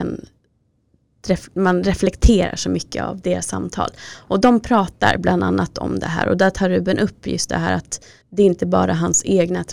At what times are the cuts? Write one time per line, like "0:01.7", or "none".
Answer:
0:08.2